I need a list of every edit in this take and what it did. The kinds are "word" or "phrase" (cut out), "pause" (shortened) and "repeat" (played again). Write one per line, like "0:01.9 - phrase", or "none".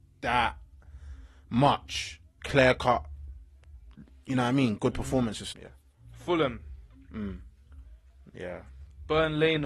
0:02.3 - pause
0:05.5 - word